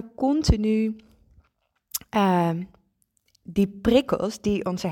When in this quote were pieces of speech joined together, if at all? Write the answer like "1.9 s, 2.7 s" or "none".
none